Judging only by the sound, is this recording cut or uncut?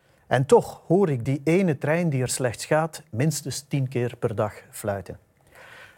uncut